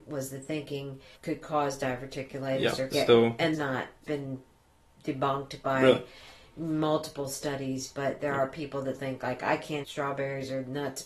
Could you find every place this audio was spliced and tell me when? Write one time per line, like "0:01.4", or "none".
0:01.1
0:02.9
0:03.5
0:04.0
0:09.0
0:09.8